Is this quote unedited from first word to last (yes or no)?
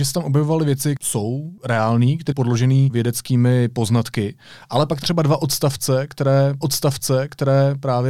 no